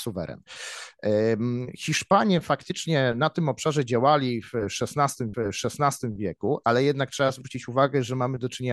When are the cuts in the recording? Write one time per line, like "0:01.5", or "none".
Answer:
0:05.3